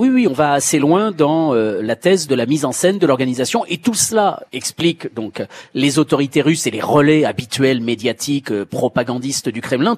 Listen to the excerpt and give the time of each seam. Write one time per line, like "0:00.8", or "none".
0:04.5